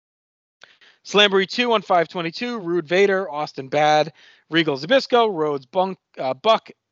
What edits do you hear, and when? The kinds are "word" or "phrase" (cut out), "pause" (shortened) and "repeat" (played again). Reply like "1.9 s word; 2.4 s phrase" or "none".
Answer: none